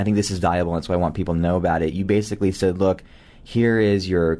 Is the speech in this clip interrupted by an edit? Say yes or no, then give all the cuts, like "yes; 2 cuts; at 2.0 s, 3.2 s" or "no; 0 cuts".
no; 0 cuts